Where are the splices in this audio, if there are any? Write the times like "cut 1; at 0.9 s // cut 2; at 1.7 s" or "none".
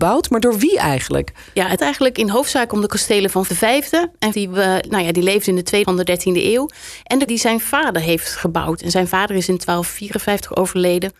cut 1; at 1.8 s // cut 2; at 3.5 s // cut 3; at 4.3 s // cut 4; at 5.8 s // cut 5; at 7.3 s